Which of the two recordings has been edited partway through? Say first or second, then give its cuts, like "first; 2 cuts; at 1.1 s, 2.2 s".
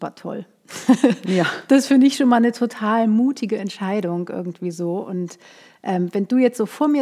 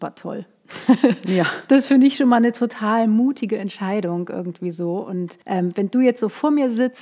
second; 1 cut; at 5.4 s